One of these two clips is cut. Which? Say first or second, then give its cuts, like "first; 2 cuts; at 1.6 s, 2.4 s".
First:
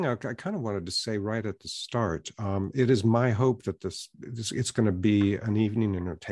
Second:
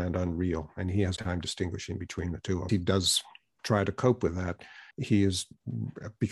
second; 3 cuts; at 1.2 s, 2.7 s, 4.9 s